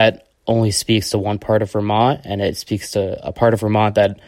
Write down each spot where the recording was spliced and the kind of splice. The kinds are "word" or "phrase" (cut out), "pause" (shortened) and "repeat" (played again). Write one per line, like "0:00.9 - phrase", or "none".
none